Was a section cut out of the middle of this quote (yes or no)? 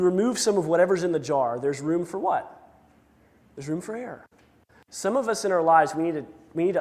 no